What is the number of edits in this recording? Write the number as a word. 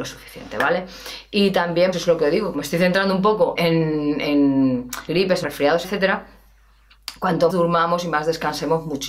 seven